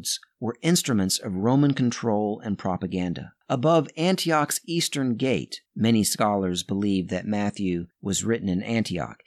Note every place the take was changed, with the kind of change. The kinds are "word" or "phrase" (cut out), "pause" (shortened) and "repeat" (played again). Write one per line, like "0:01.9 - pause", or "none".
0:03.4 - pause
0:05.7 - pause
0:07.9 - pause